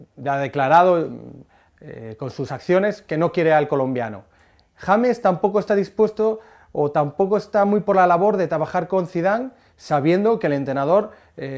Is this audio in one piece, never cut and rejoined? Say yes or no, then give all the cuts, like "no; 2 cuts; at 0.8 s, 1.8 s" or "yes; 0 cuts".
yes; 0 cuts